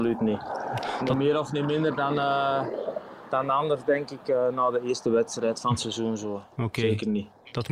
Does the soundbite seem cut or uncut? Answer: uncut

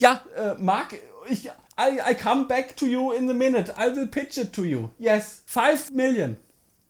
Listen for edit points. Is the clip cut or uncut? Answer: uncut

